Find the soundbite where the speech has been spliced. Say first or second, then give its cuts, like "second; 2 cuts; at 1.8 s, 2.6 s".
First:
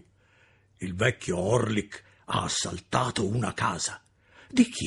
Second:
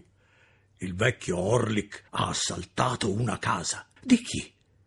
second; 2 cuts; at 2.1 s, 4.0 s